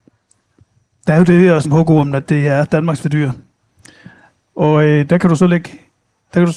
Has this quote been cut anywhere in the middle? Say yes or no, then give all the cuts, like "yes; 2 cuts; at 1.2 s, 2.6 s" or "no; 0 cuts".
yes; 2 cuts; at 1.6 s, 3.0 s